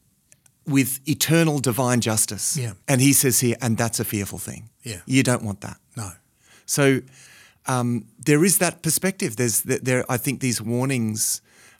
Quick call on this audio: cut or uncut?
cut